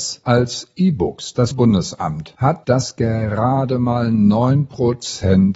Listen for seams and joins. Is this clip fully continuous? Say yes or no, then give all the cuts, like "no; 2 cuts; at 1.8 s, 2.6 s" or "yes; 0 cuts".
no; 2 cuts; at 1.5 s, 2.6 s